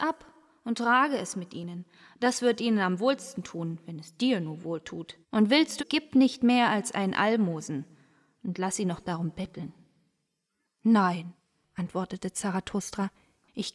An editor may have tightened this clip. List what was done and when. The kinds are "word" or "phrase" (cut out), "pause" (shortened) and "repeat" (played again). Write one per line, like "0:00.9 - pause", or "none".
0:05.2 - pause
0:05.8 - phrase